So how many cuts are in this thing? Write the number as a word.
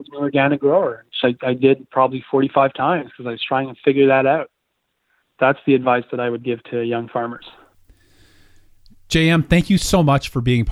zero